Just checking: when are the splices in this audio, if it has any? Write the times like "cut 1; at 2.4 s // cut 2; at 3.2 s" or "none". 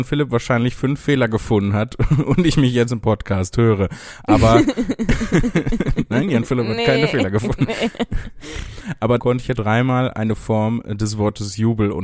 cut 1; at 2.9 s // cut 2; at 9.2 s // cut 3; at 9.6 s

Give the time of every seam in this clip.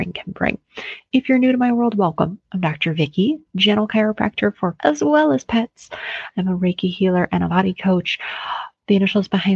cut 1; at 4.8 s // cut 2; at 7.5 s

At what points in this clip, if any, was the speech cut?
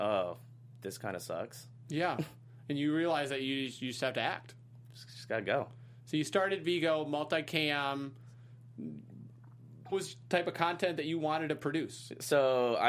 cut 1; at 9.9 s

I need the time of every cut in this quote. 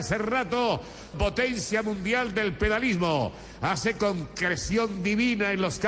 cut 1; at 1.1 s

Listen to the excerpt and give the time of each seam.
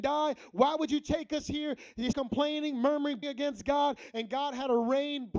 cut 1; at 2.1 s // cut 2; at 3.2 s

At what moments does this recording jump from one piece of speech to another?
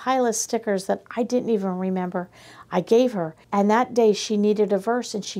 cut 1; at 3.4 s

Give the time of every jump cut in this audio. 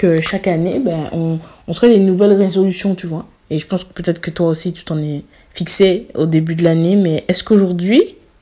none

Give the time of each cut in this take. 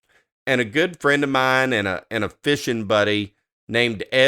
none

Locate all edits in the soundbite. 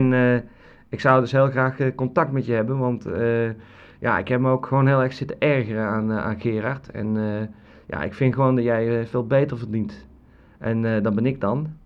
none

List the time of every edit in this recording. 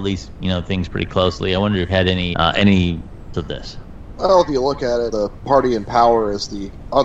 cut 1; at 1.9 s // cut 2; at 2.3 s // cut 3; at 3.3 s // cut 4; at 5.1 s

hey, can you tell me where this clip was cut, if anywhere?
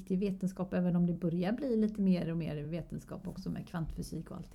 none

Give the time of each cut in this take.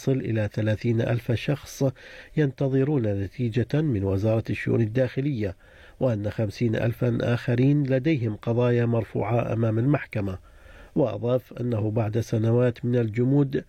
none

